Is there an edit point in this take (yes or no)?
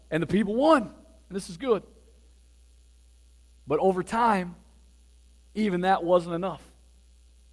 no